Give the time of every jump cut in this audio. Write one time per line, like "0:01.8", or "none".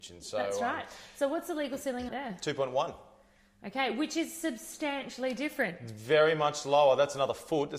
0:02.1